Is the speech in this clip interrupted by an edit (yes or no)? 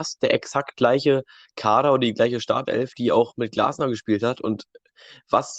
no